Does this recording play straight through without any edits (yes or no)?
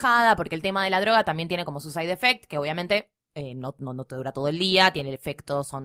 yes